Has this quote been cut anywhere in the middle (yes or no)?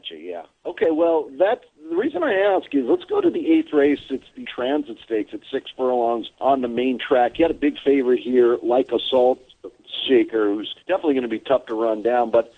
yes